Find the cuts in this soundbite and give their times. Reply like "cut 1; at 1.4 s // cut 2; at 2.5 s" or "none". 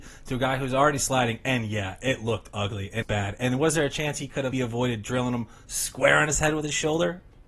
cut 1; at 3.0 s // cut 2; at 4.5 s